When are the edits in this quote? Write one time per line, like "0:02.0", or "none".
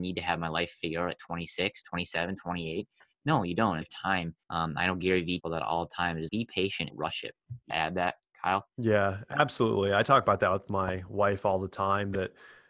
0:03.8
0:04.4
0:05.4
0:06.3
0:06.9
0:07.7